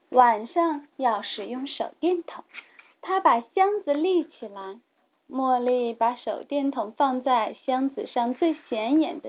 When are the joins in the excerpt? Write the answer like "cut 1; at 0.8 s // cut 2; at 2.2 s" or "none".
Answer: cut 1; at 2.5 s